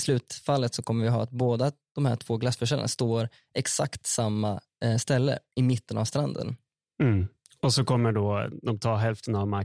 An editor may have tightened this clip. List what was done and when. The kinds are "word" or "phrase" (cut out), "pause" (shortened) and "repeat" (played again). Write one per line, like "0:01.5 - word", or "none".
none